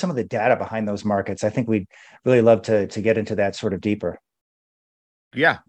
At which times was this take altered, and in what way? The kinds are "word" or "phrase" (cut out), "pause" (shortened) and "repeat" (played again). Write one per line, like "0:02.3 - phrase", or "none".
none